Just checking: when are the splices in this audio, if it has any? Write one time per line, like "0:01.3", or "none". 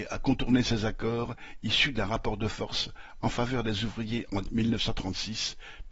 none